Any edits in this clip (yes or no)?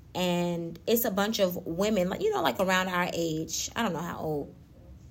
no